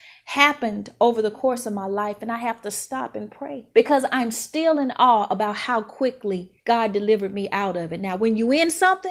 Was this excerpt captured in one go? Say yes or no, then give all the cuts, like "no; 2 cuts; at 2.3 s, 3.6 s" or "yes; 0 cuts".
no; 2 cuts; at 3.7 s, 6.6 s